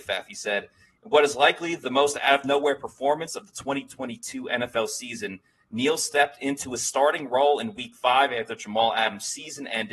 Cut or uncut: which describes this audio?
uncut